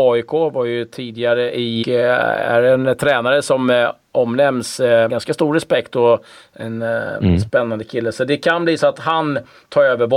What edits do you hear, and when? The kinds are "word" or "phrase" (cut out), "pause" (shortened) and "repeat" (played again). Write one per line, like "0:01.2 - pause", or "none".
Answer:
0:01.8 - phrase
0:05.1 - word